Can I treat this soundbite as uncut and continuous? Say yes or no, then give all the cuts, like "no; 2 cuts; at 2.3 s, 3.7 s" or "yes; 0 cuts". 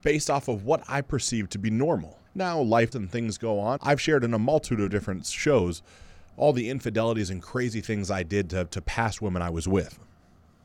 no; 3 cuts; at 2.3 s, 2.9 s, 3.8 s